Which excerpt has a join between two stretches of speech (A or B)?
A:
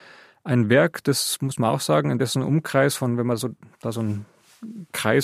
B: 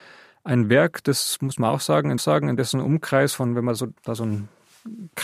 B